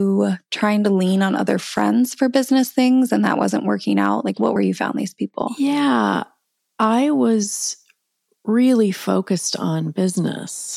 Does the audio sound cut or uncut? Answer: cut